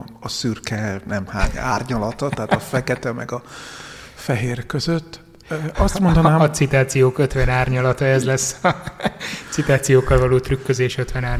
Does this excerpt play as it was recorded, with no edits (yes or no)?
no